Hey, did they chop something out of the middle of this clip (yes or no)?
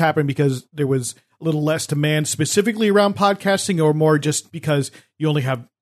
no